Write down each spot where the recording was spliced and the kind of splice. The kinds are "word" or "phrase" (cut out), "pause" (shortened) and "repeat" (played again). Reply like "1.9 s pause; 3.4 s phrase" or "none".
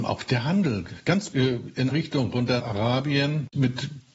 1.3 s word; 1.9 s word; 2.6 s word